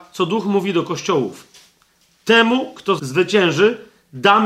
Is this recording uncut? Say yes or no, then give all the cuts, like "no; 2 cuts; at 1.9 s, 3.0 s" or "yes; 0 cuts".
no; 1 cut; at 3.0 s